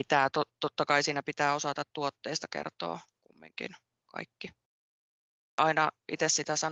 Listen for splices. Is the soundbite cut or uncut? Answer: uncut